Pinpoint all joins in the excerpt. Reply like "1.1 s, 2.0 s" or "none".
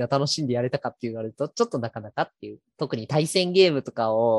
2.7 s